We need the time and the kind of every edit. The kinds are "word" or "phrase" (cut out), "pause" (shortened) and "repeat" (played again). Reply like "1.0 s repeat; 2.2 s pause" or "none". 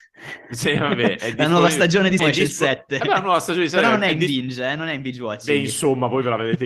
2.2 s word